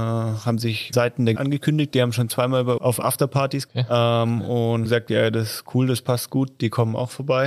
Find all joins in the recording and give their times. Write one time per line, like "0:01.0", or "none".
0:00.9
0:01.3
0:02.8
0:03.7
0:04.8